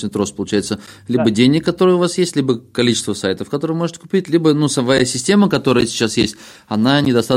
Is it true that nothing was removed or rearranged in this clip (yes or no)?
yes